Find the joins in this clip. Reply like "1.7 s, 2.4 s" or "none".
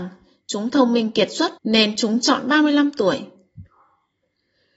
1.6 s